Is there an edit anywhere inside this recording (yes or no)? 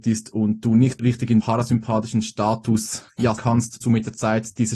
yes